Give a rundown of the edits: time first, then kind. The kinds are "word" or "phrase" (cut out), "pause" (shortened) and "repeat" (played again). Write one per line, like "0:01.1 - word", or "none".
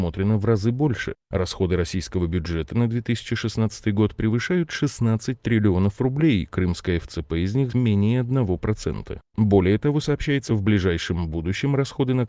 0:07.7 - word
0:10.5 - word